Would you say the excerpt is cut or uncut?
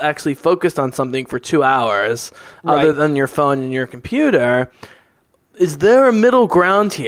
uncut